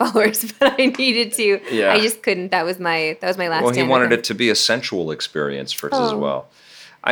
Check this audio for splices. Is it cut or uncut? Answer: cut